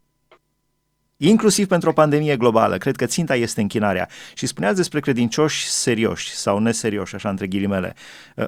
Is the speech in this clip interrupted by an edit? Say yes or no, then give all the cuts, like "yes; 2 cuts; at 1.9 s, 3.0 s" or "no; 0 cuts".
no; 0 cuts